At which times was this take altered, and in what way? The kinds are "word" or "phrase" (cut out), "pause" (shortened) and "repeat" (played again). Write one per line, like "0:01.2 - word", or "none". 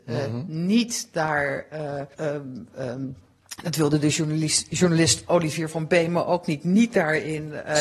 0:02.1 - pause